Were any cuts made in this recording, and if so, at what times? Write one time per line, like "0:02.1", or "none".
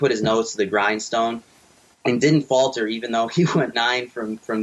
0:03.7